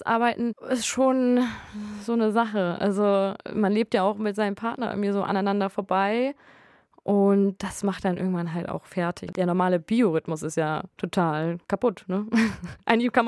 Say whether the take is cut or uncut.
uncut